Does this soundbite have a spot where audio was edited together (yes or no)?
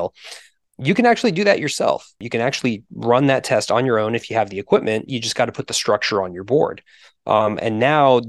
no